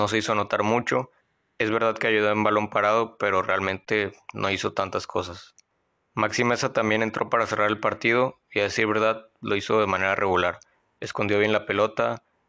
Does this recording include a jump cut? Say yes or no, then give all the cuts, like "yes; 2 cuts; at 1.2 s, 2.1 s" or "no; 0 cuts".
no; 0 cuts